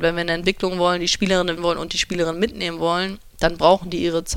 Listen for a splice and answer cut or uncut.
cut